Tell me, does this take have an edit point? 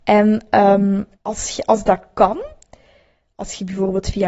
yes; 1 cut; at 1.1 s

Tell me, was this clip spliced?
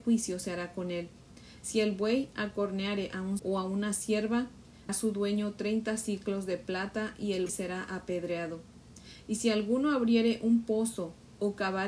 yes; 3 cuts; at 3.4 s, 4.9 s, 7.5 s

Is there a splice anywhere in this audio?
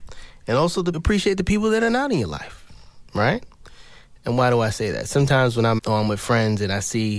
yes; 2 cuts; at 0.9 s, 5.8 s

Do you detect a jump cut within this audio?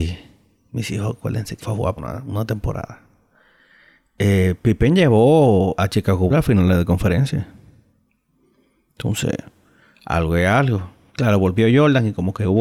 yes; 4 cuts; at 1.6 s, 2.0 s, 5.8 s, 6.3 s

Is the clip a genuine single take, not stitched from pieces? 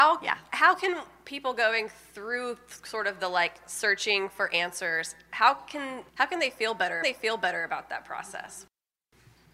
no; 2 cuts; at 6.1 s, 7.0 s

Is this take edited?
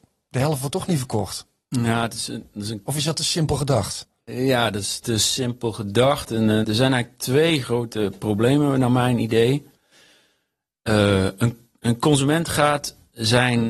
yes; 2 cuts; at 6.6 s, 7.6 s

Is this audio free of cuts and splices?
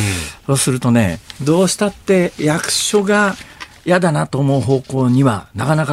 no; 1 cut; at 1.4 s

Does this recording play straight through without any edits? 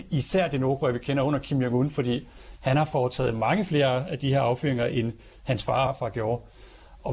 no; 1 cut; at 5.9 s

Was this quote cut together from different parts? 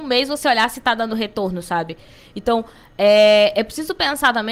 no; 0 cuts

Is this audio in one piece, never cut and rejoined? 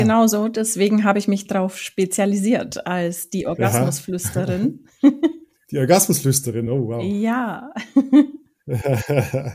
yes; 0 cuts

